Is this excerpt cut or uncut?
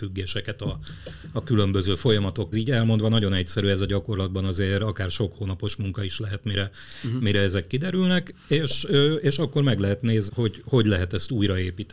cut